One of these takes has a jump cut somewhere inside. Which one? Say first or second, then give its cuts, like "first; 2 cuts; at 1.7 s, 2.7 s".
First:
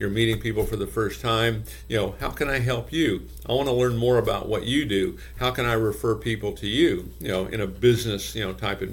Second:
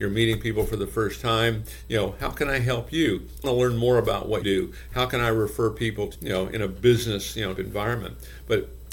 second; 4 cuts; at 3.4 s, 4.4 s, 6.1 s, 7.6 s